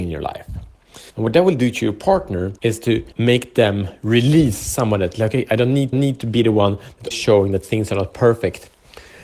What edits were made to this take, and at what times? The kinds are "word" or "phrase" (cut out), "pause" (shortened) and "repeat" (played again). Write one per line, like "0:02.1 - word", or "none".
0:01.1 - pause
0:02.6 - pause
0:03.1 - pause
0:05.9 - repeat
0:07.1 - word